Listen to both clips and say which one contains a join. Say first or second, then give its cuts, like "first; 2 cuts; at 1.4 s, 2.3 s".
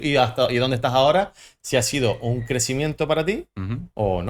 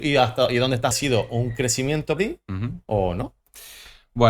second; 2 cuts; at 0.9 s, 2.2 s